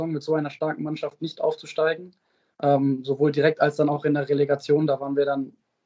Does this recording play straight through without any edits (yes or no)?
yes